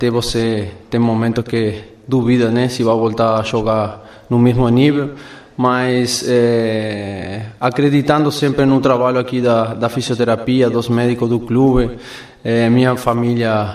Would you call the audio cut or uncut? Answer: uncut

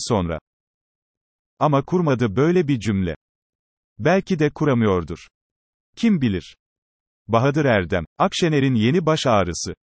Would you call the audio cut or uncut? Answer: cut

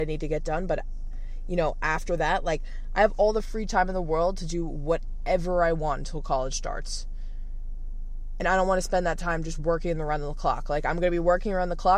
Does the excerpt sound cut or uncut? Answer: uncut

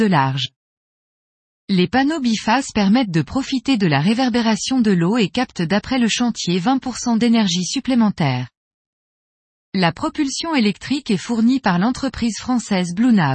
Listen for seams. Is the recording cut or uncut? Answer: uncut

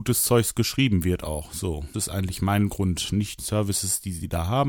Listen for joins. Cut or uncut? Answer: cut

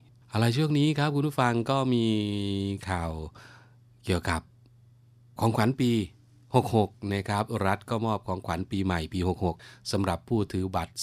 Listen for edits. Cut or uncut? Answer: uncut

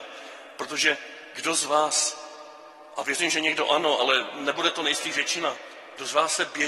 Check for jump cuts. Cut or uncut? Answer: uncut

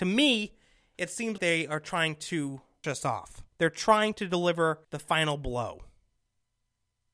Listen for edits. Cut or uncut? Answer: cut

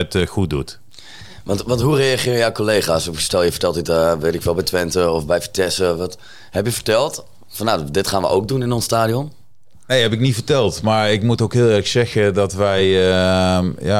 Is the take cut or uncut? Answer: uncut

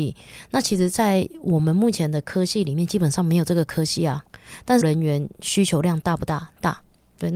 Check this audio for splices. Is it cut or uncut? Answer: cut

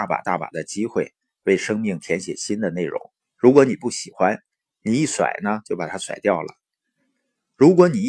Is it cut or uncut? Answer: cut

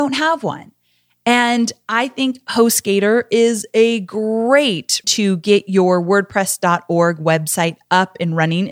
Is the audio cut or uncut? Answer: cut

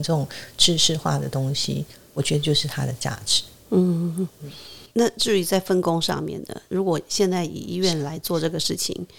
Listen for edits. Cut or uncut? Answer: cut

